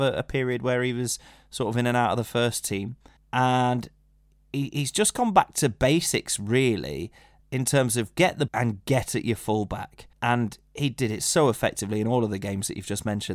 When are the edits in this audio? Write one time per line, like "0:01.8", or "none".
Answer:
0:03.2
0:08.5
0:10.1